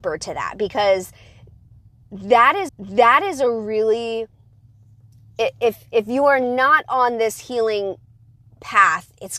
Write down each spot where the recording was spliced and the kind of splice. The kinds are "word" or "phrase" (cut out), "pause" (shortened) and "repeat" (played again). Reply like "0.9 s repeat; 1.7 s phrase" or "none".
2.7 s repeat